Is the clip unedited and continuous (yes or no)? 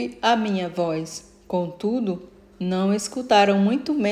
yes